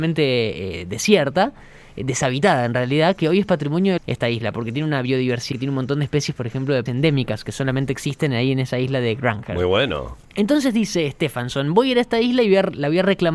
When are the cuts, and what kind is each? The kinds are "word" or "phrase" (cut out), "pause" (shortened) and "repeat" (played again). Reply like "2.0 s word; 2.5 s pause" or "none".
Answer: 4.0 s phrase; 5.5 s word; 6.9 s word; 10.2 s pause